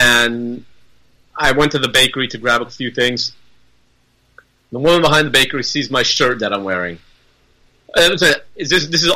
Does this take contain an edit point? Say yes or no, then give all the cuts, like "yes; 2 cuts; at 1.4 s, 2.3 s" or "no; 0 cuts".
no; 0 cuts